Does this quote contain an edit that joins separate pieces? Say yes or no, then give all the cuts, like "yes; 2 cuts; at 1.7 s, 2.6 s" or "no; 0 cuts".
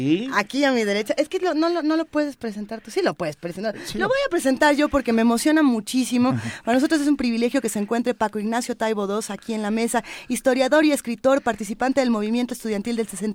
no; 0 cuts